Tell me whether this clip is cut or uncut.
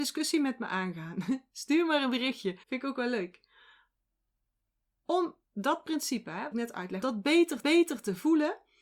cut